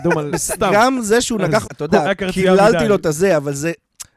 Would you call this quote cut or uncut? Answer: cut